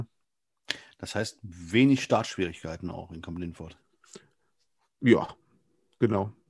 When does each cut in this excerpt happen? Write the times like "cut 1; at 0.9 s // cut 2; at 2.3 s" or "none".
none